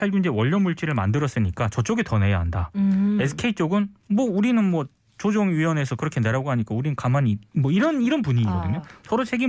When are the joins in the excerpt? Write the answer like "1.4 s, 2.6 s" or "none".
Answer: none